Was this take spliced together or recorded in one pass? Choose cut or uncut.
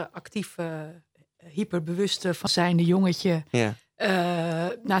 cut